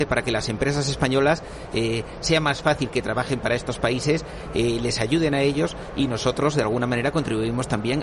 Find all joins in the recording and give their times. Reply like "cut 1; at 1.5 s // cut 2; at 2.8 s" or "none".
none